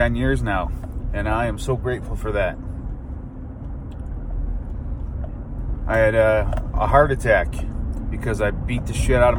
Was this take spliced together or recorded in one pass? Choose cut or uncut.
uncut